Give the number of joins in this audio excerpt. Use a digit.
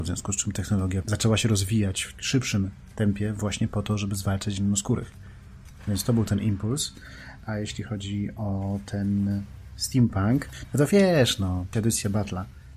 1